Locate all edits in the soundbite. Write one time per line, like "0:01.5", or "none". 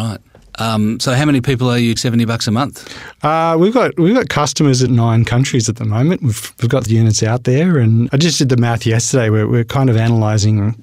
0:02.0
0:04.9
0:06.9
0:08.1